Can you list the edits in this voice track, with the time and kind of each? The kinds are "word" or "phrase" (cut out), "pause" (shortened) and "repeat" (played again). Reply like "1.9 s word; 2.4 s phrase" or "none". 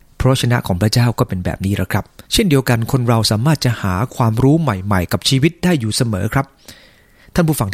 2.3 s pause